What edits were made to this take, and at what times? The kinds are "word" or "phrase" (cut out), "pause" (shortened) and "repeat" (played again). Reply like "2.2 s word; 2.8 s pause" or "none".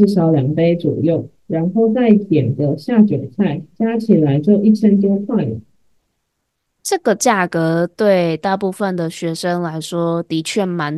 none